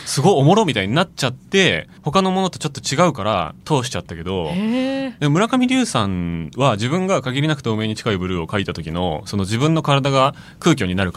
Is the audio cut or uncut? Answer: cut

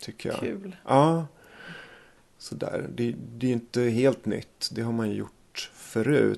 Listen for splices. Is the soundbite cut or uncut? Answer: uncut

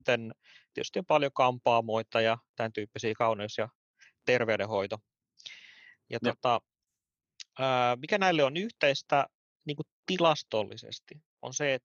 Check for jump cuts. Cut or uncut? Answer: uncut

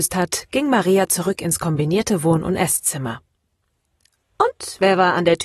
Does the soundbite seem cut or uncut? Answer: uncut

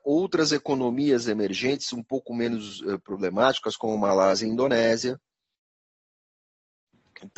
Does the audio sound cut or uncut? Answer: uncut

